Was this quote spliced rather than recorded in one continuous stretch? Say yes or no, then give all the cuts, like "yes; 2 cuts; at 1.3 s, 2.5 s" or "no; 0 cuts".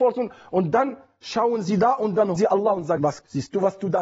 yes; 2 cuts; at 2.4 s, 3.0 s